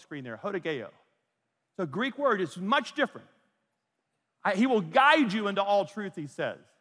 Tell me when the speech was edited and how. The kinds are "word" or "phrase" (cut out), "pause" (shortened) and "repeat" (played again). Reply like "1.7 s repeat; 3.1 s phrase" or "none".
none

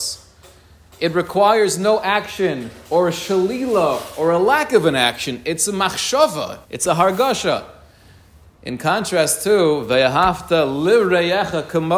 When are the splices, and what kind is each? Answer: 6.6 s pause

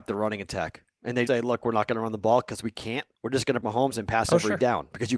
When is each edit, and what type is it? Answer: 1.3 s word; 3.2 s pause; 3.6 s phrase

